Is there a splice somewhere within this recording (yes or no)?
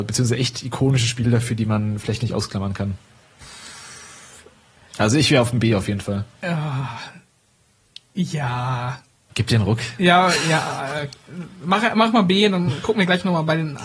no